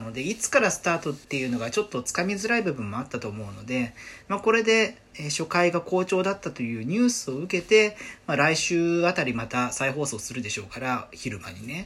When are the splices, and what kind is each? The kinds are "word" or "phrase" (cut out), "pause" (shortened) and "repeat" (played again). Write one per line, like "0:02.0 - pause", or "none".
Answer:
0:01.2 - pause